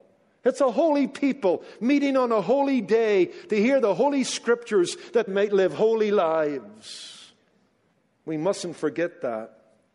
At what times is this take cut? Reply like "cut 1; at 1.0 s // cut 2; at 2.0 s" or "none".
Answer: cut 1; at 5.3 s